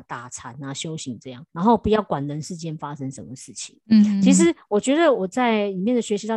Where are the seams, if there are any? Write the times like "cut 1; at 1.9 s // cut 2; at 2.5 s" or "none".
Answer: cut 1; at 1.5 s

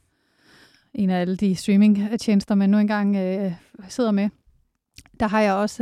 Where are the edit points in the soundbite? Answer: none

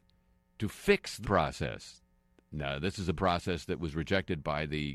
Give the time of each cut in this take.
cut 1; at 1.2 s // cut 2; at 3.1 s

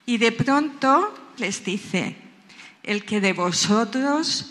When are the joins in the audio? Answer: cut 1; at 1.4 s

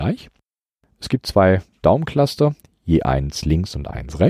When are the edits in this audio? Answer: none

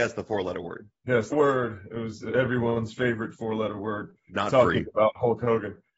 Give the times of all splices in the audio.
cut 1; at 1.3 s

